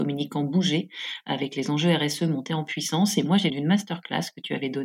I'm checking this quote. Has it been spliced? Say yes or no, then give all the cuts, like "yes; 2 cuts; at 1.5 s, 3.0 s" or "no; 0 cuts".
yes; 1 cut; at 3.5 s